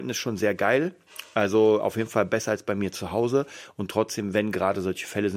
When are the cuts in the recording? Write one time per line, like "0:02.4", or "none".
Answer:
none